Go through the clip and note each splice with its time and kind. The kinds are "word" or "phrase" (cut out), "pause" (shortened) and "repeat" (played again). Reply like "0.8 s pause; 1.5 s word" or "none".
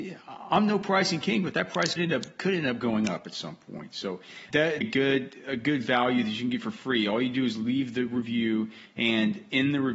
2.0 s word; 4.5 s word; 4.8 s word

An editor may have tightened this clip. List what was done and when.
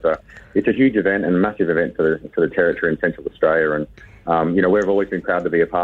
none

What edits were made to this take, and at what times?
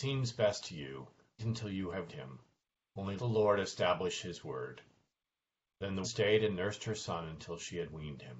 1.4 s word; 2.1 s word; 3.2 s word; 6.0 s word

